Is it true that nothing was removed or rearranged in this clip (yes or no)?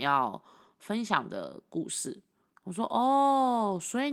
no